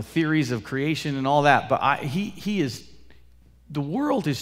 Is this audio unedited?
yes; 0 cuts

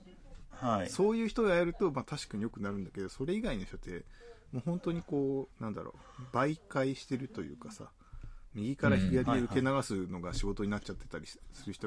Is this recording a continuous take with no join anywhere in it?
no; 1 cut; at 5.5 s

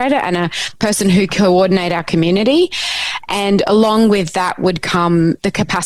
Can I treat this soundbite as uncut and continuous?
no; 1 cut; at 1.3 s

